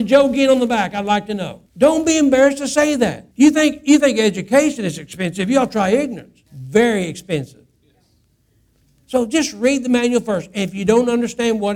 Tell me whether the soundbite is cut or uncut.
cut